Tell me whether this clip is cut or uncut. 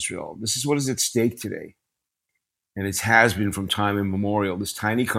uncut